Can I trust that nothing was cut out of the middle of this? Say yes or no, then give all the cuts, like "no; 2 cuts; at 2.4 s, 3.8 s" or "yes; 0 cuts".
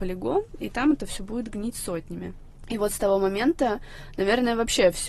yes; 0 cuts